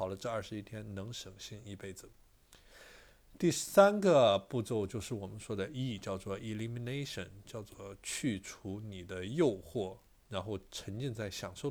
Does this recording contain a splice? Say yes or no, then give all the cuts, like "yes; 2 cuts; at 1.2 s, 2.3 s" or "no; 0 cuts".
no; 0 cuts